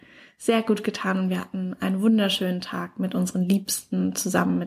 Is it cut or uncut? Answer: uncut